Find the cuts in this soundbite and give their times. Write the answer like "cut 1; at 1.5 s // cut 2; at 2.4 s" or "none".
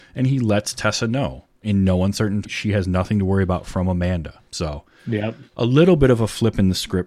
cut 1; at 1.5 s // cut 2; at 2.4 s // cut 3; at 4.4 s // cut 4; at 5.5 s

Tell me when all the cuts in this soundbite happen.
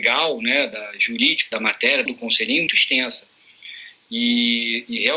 cut 1; at 1.5 s // cut 2; at 2.1 s // cut 3; at 2.7 s

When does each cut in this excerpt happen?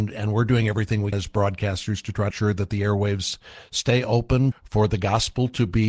cut 1; at 1.1 s // cut 2; at 2.3 s // cut 3; at 4.5 s

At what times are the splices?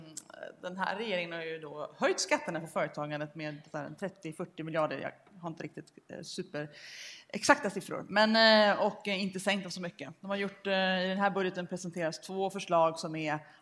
none

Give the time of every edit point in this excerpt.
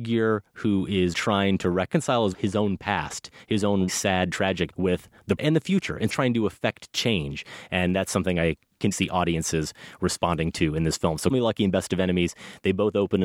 cut 1; at 1.1 s // cut 2; at 2.3 s // cut 3; at 3.9 s // cut 4; at 4.7 s // cut 5; at 5.4 s // cut 6; at 6.1 s // cut 7; at 8.9 s // cut 8; at 11.3 s

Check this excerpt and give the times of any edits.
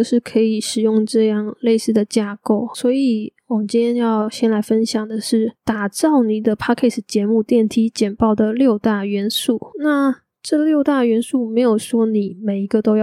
none

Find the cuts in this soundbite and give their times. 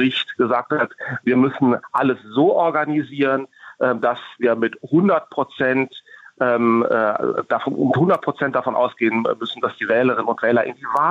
none

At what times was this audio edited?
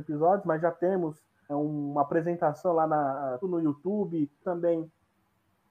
cut 1; at 1.5 s // cut 2; at 3.4 s // cut 3; at 4.4 s

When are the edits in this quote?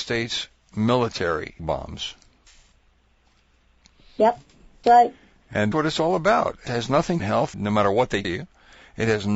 cut 1; at 1.6 s // cut 2; at 4.8 s // cut 3; at 5.7 s // cut 4; at 6.7 s // cut 5; at 7.2 s // cut 6; at 7.5 s // cut 7; at 8.2 s

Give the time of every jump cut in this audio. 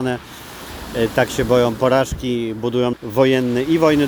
cut 1; at 2.9 s

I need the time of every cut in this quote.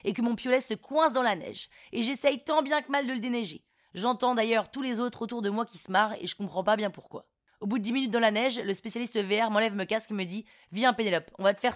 none

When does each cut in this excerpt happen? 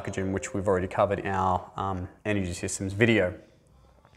cut 1; at 1.2 s // cut 2; at 2.2 s

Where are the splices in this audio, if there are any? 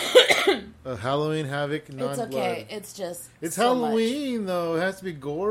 none

